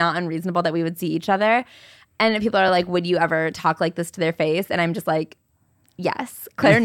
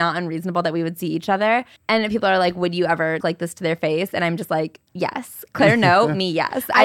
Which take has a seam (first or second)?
second